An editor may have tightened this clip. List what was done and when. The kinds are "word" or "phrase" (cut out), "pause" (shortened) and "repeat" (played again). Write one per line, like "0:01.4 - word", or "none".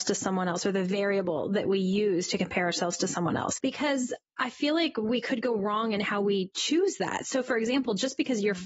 none